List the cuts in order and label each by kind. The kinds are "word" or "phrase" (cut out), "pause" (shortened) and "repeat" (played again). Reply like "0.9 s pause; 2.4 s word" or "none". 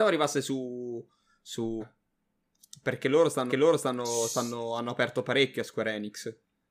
1.8 s phrase; 3.5 s repeat